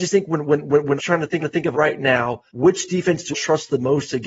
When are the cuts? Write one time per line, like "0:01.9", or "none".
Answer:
0:01.0
0:01.4
0:01.7
0:02.5
0:03.3